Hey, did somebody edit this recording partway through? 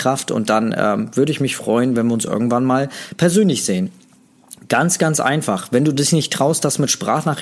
no; 0 cuts

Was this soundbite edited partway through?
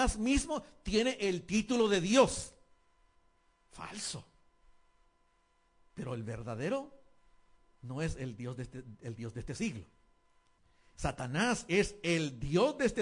no; 0 cuts

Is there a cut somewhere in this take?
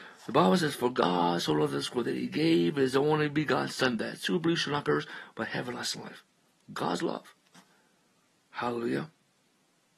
no; 0 cuts

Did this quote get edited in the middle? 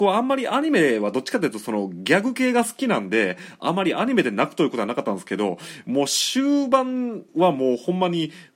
yes; 1 cut; at 7.3 s

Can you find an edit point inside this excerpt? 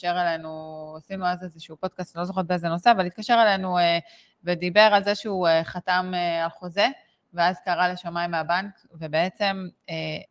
no; 0 cuts

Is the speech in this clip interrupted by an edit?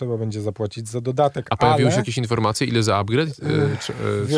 no; 0 cuts

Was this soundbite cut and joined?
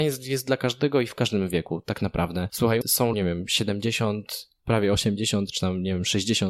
yes; 2 cuts; at 2.8 s, 3.1 s

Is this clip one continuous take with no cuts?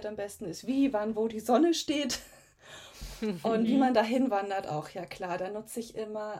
yes; 0 cuts

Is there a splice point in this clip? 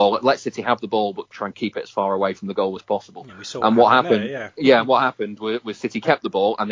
no; 0 cuts

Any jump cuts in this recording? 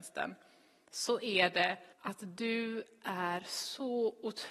yes; 1 cut; at 1.9 s

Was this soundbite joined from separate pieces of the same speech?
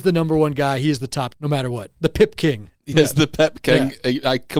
yes; 2 cuts; at 1.3 s, 2.9 s

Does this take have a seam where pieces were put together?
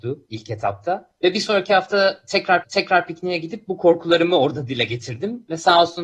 yes; 1 cut; at 2.6 s

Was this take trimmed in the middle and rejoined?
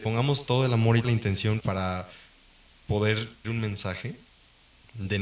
yes; 3 cuts; at 1.0 s, 1.6 s, 3.4 s

